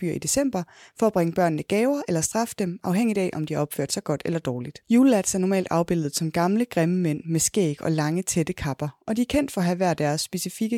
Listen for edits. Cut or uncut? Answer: cut